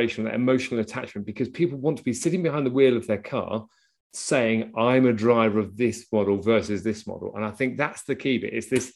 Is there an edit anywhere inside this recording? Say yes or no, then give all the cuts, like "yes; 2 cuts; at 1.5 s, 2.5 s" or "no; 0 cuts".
no; 0 cuts